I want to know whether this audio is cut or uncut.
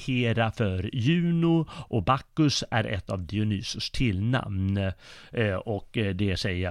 uncut